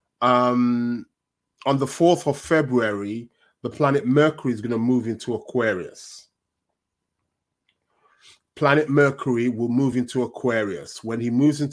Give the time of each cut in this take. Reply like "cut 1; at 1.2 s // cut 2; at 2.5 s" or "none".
none